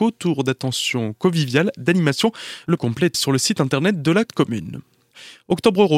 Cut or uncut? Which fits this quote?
cut